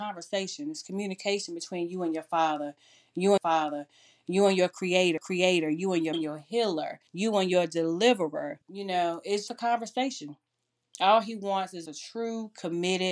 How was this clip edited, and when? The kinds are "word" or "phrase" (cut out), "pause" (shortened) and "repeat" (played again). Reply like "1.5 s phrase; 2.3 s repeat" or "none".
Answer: 3.4 s repeat; 5.2 s repeat; 6.1 s phrase; 7.1 s pause; 8.6 s pause; 9.5 s word; 11.9 s word

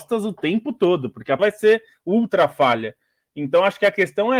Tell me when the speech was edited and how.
1.4 s word

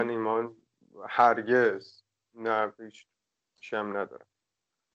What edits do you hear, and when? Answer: none

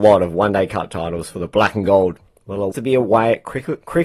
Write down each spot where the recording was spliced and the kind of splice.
2.7 s word

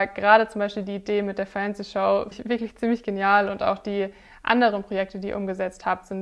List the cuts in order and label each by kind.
2.3 s word

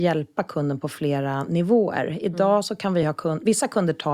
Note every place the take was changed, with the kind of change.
none

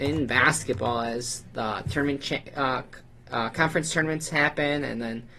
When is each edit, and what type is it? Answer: none

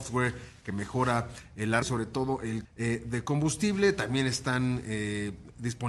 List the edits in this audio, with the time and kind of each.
1.8 s word; 2.6 s word

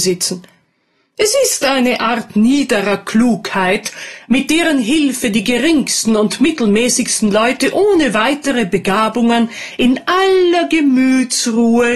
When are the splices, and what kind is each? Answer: none

